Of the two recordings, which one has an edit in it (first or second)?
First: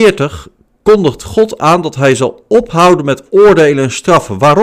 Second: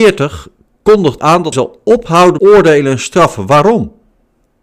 second